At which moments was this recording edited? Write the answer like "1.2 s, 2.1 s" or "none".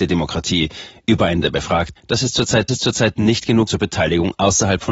1.4 s, 2.0 s, 2.7 s, 3.7 s